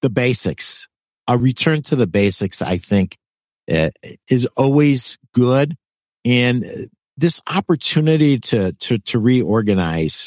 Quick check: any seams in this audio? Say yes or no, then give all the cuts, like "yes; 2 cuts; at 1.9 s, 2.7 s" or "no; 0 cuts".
no; 0 cuts